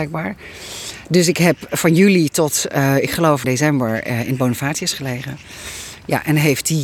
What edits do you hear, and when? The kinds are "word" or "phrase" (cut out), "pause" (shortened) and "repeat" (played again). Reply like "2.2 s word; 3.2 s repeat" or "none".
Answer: 3.4 s word